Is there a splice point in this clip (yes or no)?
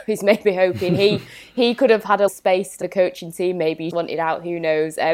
yes